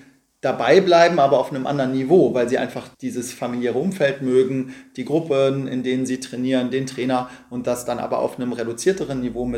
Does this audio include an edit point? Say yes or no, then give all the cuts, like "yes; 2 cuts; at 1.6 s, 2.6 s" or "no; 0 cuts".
yes; 1 cut; at 2.9 s